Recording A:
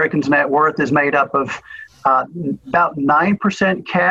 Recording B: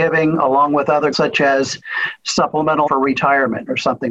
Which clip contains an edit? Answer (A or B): B